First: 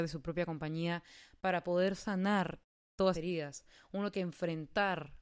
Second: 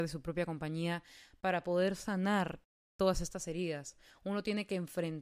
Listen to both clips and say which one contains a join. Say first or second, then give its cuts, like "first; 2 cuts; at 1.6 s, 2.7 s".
first; 2 cuts; at 3.1 s, 4.1 s